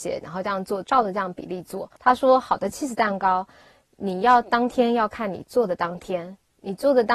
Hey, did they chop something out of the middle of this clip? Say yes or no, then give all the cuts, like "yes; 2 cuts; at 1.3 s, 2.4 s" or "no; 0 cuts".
yes; 1 cut; at 2.0 s